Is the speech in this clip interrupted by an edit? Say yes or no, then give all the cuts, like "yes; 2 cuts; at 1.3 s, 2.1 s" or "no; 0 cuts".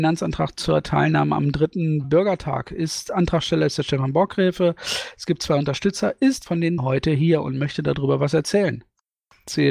yes; 3 cuts; at 2.0 s, 6.5 s, 6.8 s